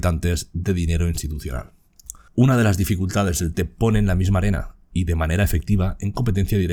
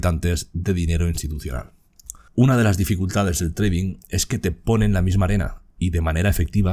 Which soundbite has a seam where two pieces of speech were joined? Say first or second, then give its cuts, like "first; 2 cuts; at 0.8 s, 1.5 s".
first; 1 cut; at 3.5 s